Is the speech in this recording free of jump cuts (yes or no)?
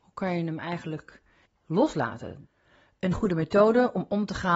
no